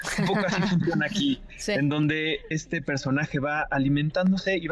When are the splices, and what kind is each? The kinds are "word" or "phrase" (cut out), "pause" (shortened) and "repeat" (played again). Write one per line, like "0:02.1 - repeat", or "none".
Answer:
0:02.5 - word